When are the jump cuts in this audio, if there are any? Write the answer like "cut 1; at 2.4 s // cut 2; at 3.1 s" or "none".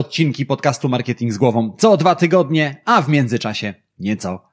none